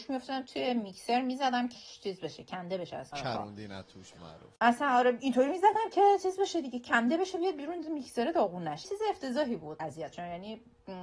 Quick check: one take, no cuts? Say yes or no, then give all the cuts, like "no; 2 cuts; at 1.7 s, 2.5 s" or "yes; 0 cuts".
no; 7 cuts; at 1.8 s, 3.1 s, 4.2 s, 4.6 s, 8.8 s, 9.8 s, 10.1 s